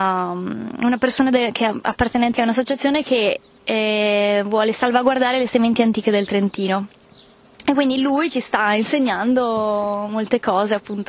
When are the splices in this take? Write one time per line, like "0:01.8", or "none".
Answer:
0:02.3